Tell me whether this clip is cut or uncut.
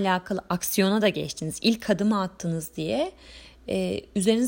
uncut